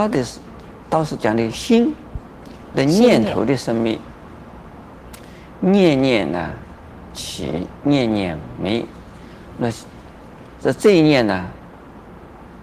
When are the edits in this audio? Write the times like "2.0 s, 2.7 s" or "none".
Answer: 2.7 s